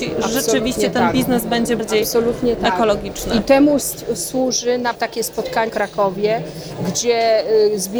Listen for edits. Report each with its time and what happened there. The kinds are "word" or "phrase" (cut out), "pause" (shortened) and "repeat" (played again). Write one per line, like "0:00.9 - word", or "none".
0:01.8 - word
0:04.9 - word
0:05.7 - phrase